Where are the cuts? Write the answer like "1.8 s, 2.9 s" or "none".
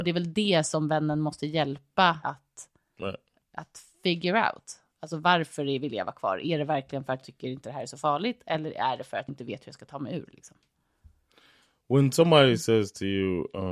2.2 s, 7.2 s, 9.3 s